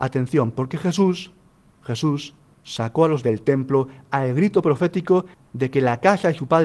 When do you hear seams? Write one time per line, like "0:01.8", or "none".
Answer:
0:03.2